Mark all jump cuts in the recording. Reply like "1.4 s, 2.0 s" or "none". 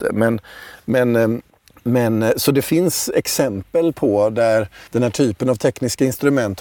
1.5 s, 4.9 s